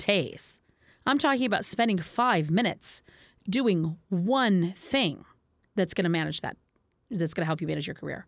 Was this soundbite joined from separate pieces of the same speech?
no; 0 cuts

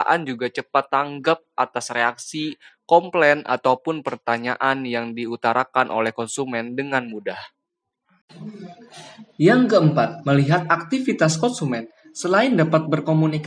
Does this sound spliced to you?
no; 0 cuts

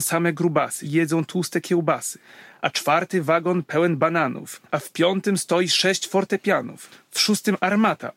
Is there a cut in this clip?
no; 0 cuts

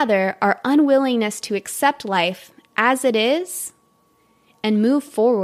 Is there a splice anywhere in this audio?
no; 0 cuts

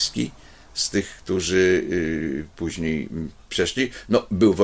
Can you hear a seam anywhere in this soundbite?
no; 0 cuts

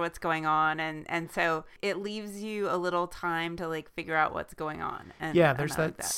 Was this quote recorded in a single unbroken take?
yes; 0 cuts

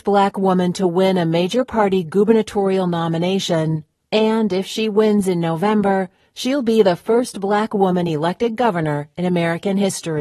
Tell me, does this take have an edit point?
no; 0 cuts

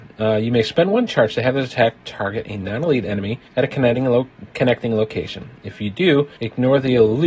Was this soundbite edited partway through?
yes; 2 cuts; at 3.5 s, 6.4 s

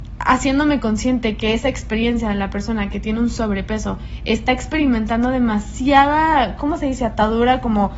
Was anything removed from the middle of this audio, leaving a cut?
no; 0 cuts

